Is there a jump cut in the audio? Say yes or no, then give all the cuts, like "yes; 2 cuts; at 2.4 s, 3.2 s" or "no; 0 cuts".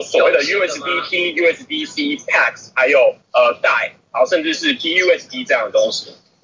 yes; 1 cut; at 3.2 s